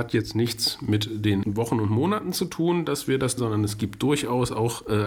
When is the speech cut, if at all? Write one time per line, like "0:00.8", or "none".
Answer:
0:01.4
0:03.4